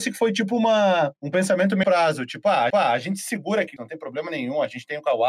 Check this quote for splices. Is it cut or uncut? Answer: cut